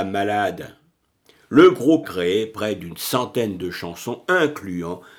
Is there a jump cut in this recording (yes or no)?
yes